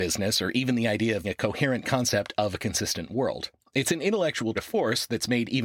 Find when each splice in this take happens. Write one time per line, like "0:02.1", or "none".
0:01.2
0:04.5